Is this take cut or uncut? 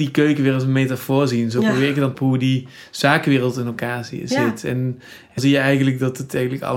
cut